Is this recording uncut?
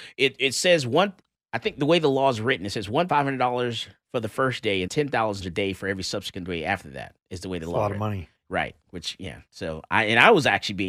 no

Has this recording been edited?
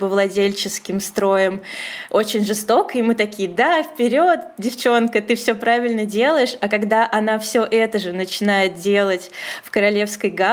no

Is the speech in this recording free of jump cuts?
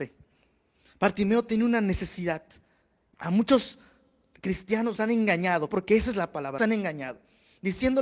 no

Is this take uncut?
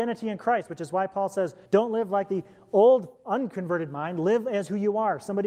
no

